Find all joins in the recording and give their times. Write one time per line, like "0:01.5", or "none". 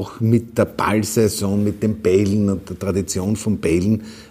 none